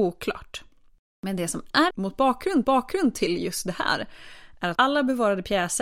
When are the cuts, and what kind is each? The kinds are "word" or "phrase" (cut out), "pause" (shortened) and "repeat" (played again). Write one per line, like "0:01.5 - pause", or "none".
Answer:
0:01.9 - word
0:02.6 - repeat
0:04.8 - word